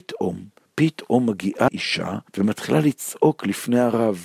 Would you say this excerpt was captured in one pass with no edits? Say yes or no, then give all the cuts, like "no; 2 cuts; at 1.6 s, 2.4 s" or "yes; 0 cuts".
no; 2 cuts; at 1.7 s, 2.3 s